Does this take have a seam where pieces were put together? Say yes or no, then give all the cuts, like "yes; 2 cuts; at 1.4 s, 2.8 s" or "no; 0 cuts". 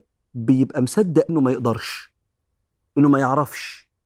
yes; 1 cut; at 1.3 s